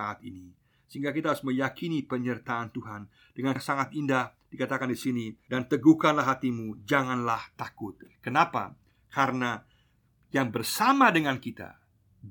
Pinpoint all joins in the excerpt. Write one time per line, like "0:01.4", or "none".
0:03.6
0:05.5